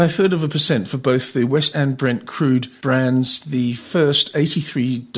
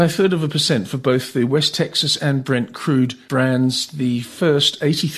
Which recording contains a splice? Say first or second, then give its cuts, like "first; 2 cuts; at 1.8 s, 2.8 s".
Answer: first; 1 cut; at 1.7 s